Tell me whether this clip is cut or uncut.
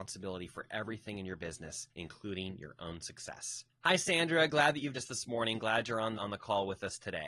cut